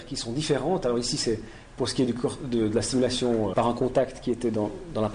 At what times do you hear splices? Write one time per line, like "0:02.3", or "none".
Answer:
0:03.5

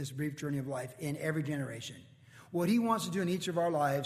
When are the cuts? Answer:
none

